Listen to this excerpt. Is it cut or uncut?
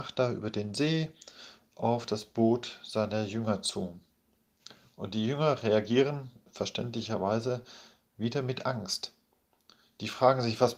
uncut